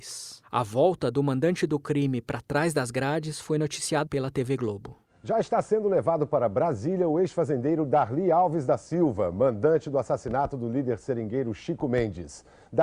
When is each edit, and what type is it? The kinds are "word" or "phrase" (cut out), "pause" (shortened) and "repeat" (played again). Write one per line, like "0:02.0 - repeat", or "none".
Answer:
0:04.1 - word